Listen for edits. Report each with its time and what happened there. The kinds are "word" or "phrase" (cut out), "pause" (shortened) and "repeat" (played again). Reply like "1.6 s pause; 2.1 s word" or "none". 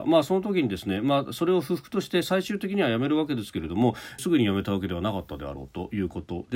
4.2 s phrase